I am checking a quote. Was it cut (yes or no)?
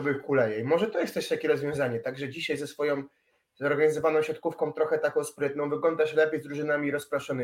no